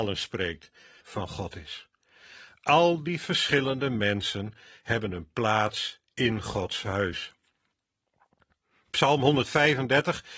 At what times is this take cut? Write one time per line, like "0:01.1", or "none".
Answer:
0:01.0